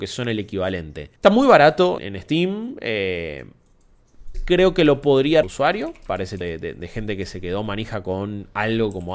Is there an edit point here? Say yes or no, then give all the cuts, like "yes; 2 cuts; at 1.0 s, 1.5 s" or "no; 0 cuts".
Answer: yes; 5 cuts; at 1.2 s, 2.0 s, 4.3 s, 5.4 s, 6.4 s